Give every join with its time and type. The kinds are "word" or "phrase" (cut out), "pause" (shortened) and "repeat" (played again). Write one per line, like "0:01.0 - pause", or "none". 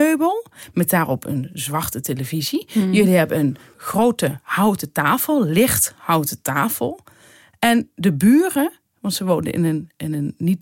none